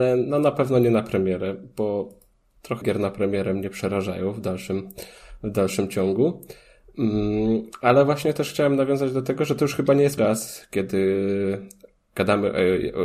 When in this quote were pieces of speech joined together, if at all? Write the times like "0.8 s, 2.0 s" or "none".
2.8 s, 10.2 s